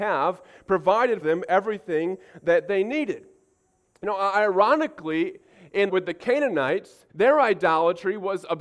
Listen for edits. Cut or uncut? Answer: cut